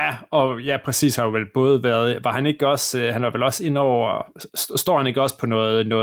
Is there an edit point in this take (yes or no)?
no